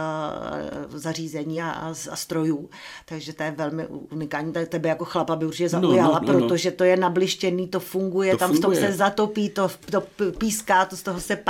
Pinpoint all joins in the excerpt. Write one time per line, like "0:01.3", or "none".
none